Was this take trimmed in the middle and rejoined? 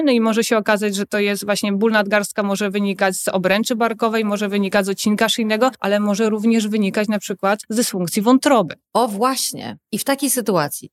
no; 0 cuts

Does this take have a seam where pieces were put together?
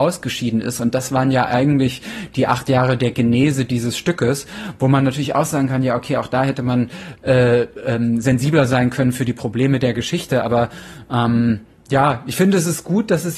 no; 0 cuts

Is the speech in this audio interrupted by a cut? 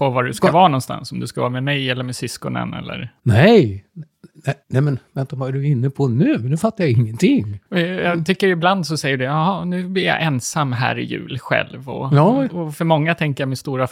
yes; 3 cuts; at 3.2 s, 4.6 s, 7.7 s

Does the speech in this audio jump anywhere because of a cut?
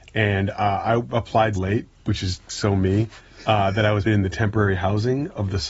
yes; 3 cuts; at 1.6 s, 1.9 s, 4.1 s

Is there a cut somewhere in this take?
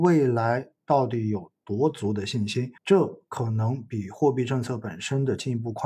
yes; 1 cut; at 2.8 s

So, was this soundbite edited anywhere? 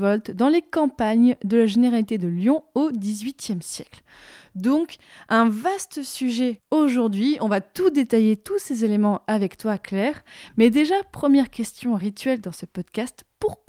no; 0 cuts

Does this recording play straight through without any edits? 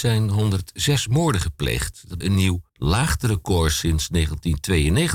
no; 2 cuts; at 2.2 s, 2.7 s

